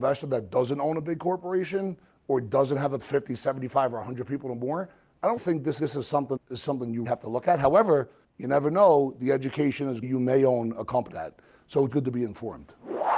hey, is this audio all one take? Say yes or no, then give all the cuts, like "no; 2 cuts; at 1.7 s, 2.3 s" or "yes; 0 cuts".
no; 9 cuts; at 3.0 s, 5.4 s, 5.8 s, 6.4 s, 7.0 s, 8.2 s, 10.0 s, 11.1 s, 11.9 s